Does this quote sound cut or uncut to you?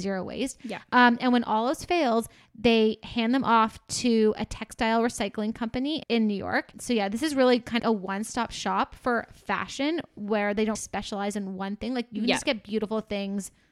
cut